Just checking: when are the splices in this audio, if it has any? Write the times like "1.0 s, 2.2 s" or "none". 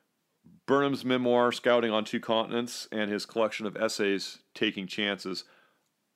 none